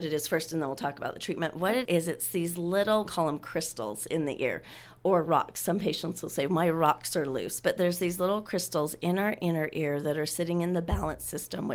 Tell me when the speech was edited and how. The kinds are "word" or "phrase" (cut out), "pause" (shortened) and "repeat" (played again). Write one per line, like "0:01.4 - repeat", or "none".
0:01.8 - word
0:03.1 - word